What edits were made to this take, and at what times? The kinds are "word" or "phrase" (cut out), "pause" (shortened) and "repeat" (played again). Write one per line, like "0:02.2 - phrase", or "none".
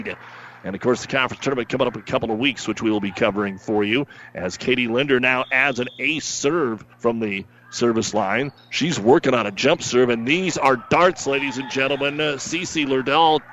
0:06.9 - pause